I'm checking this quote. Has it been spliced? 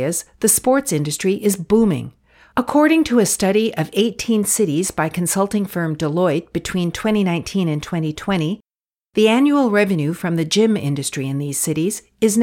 no; 0 cuts

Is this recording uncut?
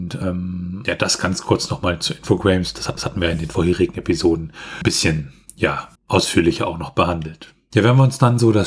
no; 2 cuts; at 3.0 s, 6.0 s

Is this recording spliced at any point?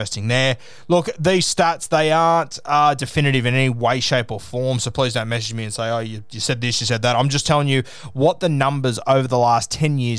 no; 0 cuts

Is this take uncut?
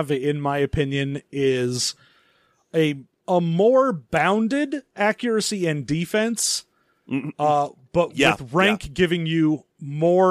yes; 0 cuts

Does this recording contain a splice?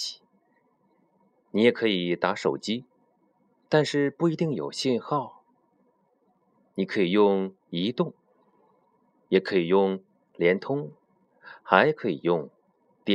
no; 0 cuts

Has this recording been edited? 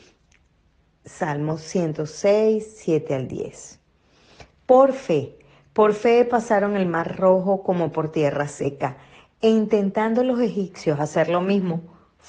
no; 0 cuts

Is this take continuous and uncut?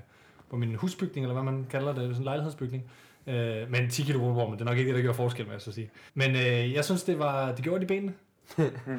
no; 1 cut; at 6.1 s

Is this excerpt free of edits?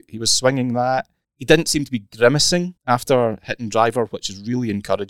no; 2 cuts; at 1.2 s, 2.8 s

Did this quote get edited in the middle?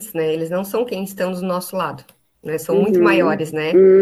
no; 0 cuts

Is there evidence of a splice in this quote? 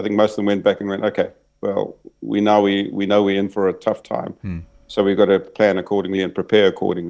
no; 0 cuts

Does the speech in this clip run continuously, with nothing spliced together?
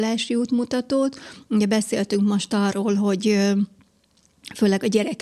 yes; 0 cuts

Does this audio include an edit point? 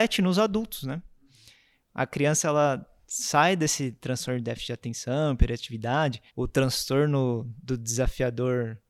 yes; 1 cut; at 6.3 s

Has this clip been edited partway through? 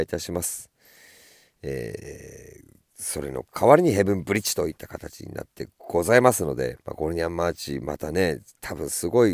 yes; 2 cuts; at 2.9 s, 6.8 s

